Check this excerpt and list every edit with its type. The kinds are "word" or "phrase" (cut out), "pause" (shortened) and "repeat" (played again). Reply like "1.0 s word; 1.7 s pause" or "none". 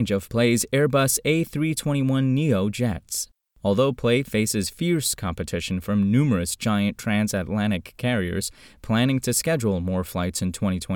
none